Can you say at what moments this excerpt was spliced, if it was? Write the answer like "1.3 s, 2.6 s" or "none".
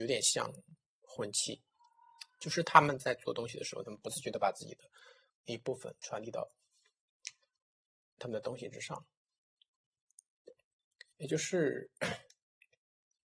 5.3 s, 11.1 s